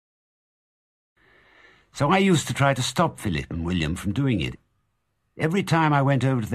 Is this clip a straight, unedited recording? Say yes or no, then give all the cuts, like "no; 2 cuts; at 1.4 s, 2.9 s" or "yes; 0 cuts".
yes; 0 cuts